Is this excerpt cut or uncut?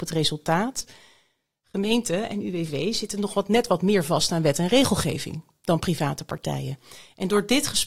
uncut